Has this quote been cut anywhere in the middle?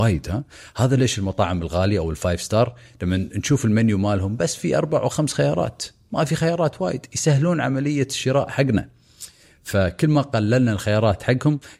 no; 0 cuts

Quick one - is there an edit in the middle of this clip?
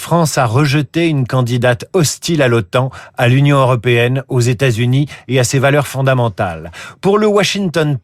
no; 0 cuts

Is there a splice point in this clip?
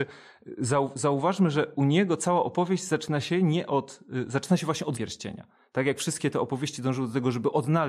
yes; 1 cut; at 4.9 s

